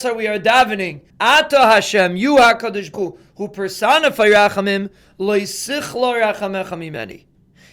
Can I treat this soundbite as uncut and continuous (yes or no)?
no